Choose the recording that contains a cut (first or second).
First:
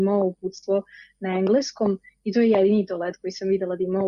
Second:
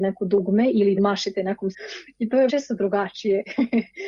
second